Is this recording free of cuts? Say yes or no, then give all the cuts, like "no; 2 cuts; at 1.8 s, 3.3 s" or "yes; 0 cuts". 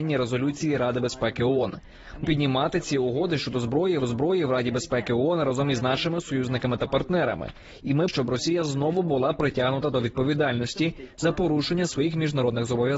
no; 3 cuts; at 2.2 s, 4.0 s, 8.1 s